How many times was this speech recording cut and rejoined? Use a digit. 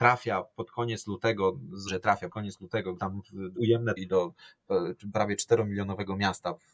5